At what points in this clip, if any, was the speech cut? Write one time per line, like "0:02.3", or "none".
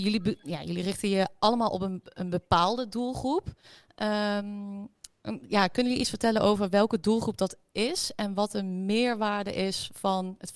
none